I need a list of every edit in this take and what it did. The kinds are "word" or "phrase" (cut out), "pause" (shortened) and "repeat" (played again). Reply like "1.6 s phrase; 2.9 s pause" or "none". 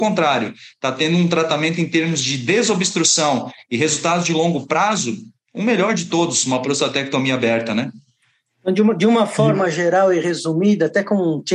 none